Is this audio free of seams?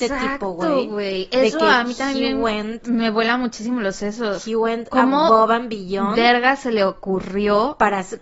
yes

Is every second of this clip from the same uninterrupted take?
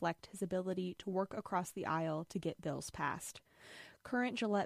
yes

